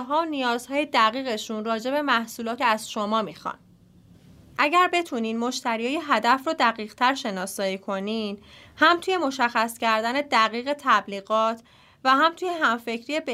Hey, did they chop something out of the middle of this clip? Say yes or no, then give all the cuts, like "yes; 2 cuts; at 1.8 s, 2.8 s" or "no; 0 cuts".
yes; 1 cut; at 2.6 s